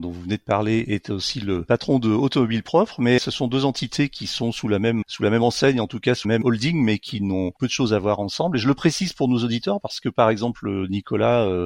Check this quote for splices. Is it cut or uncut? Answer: cut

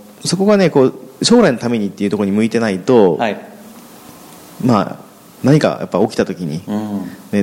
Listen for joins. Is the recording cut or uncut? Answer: uncut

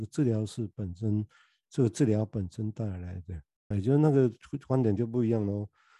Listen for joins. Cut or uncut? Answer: cut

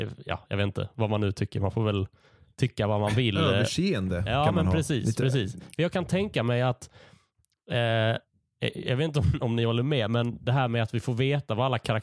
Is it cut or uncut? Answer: uncut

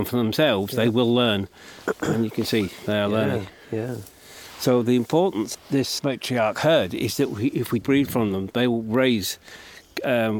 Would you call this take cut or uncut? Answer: cut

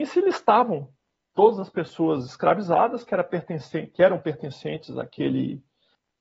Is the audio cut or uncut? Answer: uncut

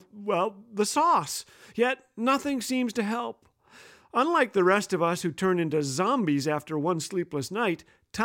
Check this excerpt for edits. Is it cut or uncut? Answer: uncut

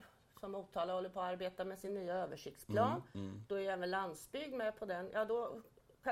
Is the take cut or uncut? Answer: uncut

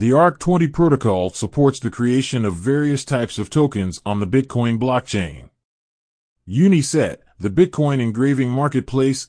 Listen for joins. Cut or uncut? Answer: uncut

